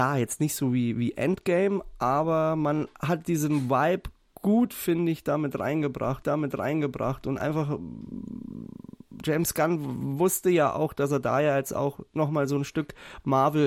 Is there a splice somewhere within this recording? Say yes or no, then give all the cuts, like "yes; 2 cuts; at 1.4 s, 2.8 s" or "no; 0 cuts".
yes; 1 cut; at 6.2 s